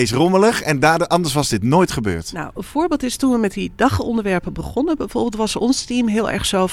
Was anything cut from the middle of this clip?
no; 0 cuts

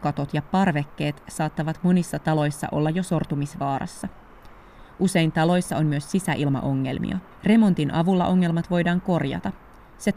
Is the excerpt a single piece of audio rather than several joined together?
no; 1 cut; at 7.3 s

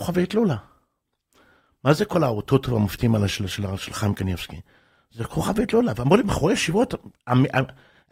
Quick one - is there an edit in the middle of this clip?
no; 0 cuts

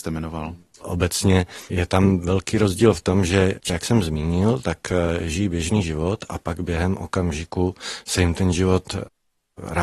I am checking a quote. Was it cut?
yes; 1 cut; at 3.7 s

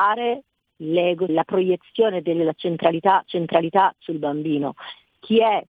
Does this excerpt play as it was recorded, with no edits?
no; 2 cuts; at 1.3 s, 3.2 s

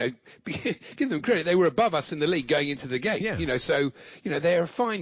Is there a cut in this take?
no; 0 cuts

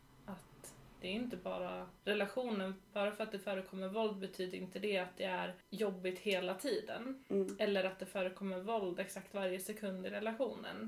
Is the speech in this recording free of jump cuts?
no; 2 cuts; at 2.0 s, 5.6 s

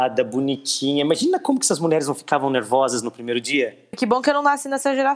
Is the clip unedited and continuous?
yes; 0 cuts

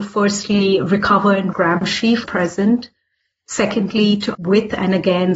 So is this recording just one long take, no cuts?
no; 3 cuts; at 1.5 s, 2.2 s, 4.3 s

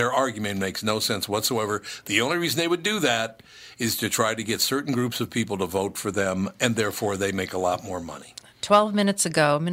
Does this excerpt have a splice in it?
no; 0 cuts

